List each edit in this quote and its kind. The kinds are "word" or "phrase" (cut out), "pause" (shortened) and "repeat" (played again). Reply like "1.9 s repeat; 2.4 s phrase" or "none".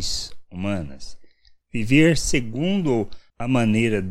none